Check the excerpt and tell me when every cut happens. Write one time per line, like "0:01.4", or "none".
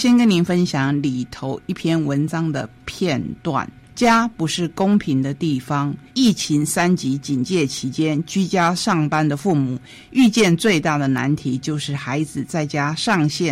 0:06.1